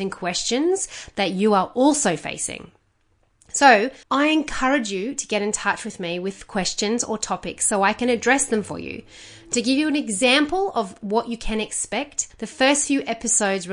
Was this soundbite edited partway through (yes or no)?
yes